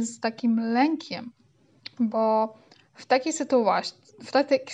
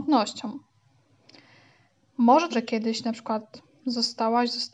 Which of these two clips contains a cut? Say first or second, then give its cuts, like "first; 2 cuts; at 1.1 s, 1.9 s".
second; 1 cut; at 2.5 s